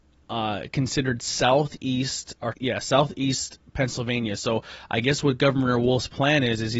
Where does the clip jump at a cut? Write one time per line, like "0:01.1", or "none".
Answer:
0:02.5

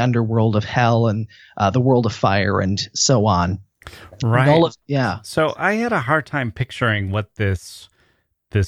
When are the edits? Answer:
0:04.8

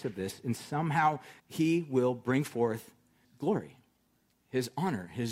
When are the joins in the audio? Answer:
0:01.4
0:03.2

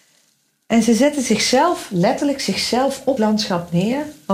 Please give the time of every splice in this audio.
0:03.2

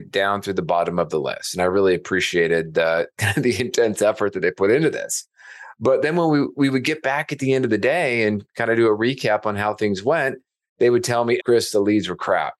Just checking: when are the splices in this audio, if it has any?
0:11.4

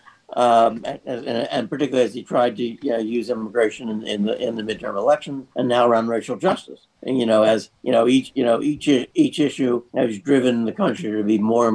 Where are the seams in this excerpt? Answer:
0:05.5
0:07.0
0:07.8
0:09.9

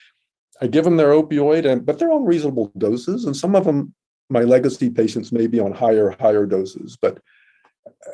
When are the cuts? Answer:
none

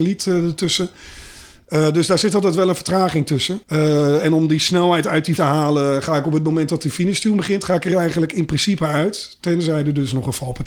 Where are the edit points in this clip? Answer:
0:03.6
0:05.4

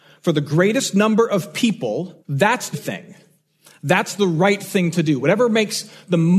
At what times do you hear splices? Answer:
0:02.2
0:02.7

